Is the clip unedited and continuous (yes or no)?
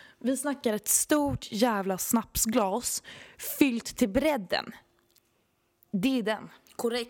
yes